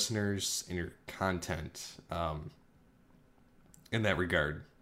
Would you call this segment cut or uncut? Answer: uncut